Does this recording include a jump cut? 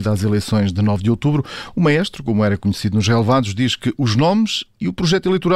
no; 0 cuts

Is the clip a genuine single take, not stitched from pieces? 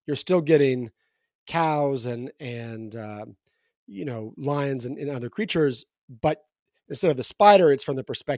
yes; 0 cuts

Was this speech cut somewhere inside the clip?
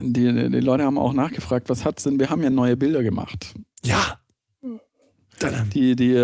no; 0 cuts

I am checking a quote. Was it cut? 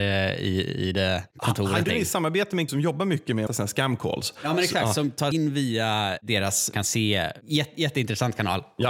yes; 5 cuts; at 1.8 s, 2.7 s, 3.5 s, 5.3 s, 6.7 s

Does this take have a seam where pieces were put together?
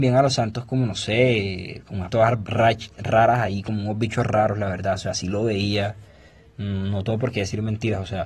yes; 1 cut; at 2.1 s

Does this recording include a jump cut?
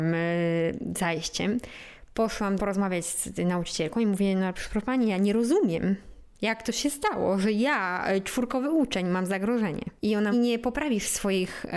yes; 2 cuts; at 10.0 s, 10.3 s

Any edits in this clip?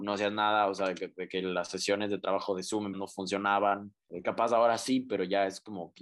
yes; 1 cut; at 2.9 s

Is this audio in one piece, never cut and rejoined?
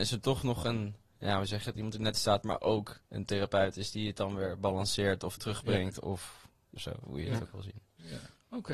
no; 3 cuts; at 2.1 s, 3.0 s, 6.8 s

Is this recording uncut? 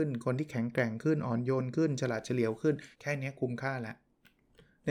no; 1 cut; at 2.9 s

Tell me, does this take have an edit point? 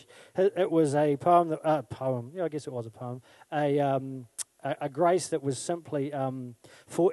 no; 0 cuts

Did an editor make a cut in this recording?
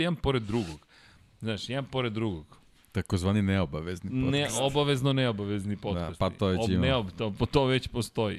no; 0 cuts

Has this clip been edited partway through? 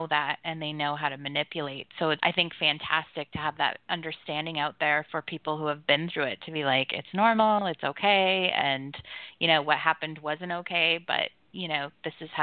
yes; 1 cut; at 2.2 s

